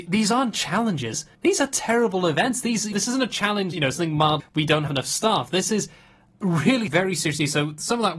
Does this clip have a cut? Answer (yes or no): yes